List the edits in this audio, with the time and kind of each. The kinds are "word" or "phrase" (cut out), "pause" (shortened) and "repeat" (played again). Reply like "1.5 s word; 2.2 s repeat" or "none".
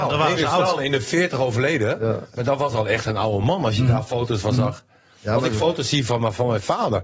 none